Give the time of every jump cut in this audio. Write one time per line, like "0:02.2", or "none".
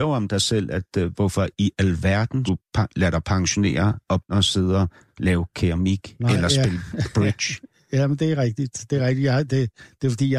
0:02.5
0:04.3